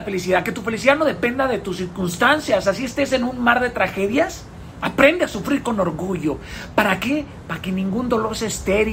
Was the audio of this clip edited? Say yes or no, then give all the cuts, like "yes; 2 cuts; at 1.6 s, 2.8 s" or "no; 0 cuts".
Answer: no; 0 cuts